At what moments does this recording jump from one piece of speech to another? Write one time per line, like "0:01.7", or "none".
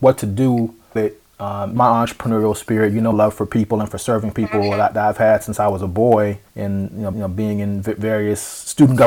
0:01.0
0:01.8
0:03.1
0:06.5
0:07.1